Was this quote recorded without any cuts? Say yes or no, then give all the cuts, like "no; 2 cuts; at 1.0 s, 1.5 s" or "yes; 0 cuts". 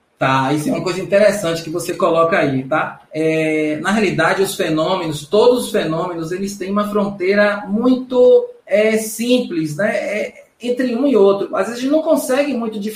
no; 2 cuts; at 3.1 s, 8.6 s